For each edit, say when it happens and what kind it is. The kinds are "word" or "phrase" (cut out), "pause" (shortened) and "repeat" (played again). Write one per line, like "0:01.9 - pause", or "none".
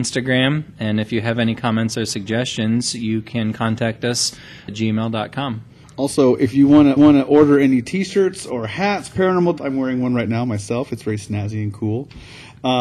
0:04.7 - word
0:05.8 - pause
0:07.0 - repeat
0:09.6 - phrase